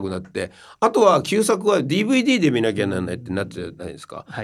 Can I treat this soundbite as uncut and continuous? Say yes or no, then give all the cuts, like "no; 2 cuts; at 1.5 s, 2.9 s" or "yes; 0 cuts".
yes; 0 cuts